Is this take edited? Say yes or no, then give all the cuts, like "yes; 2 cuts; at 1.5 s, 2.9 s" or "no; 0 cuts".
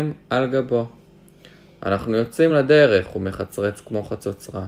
no; 0 cuts